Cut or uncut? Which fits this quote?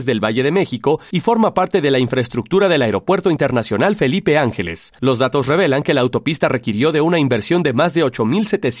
uncut